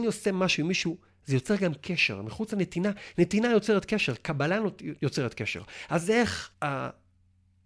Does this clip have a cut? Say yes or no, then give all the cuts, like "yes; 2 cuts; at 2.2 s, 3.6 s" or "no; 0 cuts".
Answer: yes; 2 cuts; at 5.0 s, 6.5 s